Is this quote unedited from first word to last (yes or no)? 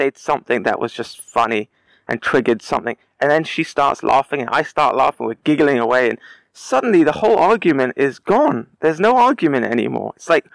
yes